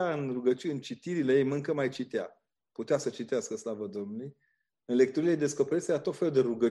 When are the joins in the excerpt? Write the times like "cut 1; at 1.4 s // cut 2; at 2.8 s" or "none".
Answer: none